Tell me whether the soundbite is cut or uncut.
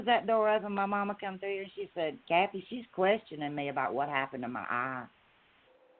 uncut